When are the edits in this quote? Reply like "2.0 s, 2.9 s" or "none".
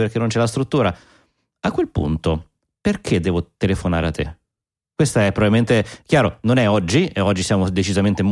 none

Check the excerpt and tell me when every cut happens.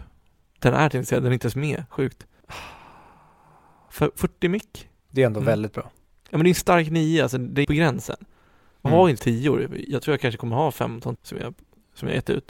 7.6 s, 8.9 s, 9.2 s, 11.2 s

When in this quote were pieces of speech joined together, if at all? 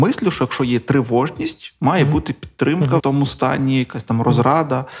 3.0 s

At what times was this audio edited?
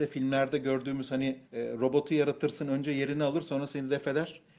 1.4 s

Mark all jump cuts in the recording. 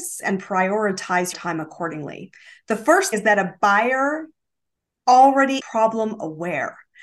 1.3 s, 3.1 s, 5.6 s

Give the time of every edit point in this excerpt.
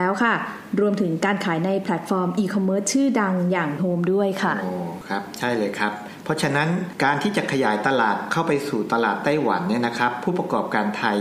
3.8 s

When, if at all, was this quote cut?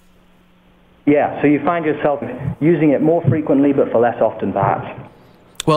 2.2 s

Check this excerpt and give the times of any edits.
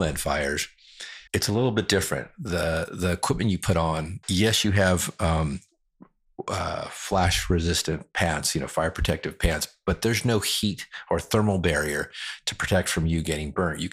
1.3 s, 4.2 s

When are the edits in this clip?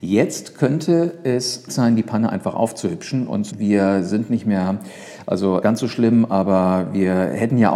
1.7 s, 3.5 s, 5.6 s

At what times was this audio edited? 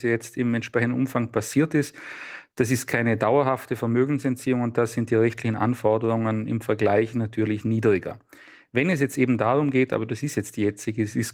none

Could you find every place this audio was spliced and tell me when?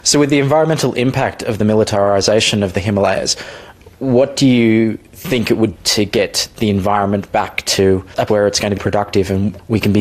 5.8 s, 8.3 s, 8.8 s

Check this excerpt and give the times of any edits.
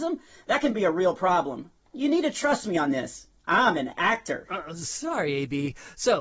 none

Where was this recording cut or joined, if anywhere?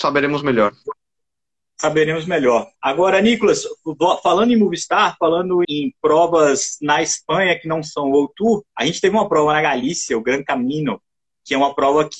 2.8 s, 5.6 s, 8.7 s

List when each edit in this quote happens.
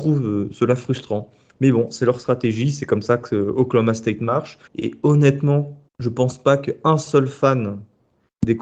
4.7 s, 5.9 s

